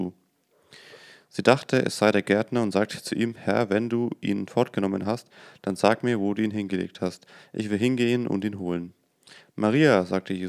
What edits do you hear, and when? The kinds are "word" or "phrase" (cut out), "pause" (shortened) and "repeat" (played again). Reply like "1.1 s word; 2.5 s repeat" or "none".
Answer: none